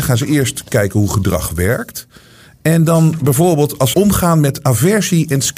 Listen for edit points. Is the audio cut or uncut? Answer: cut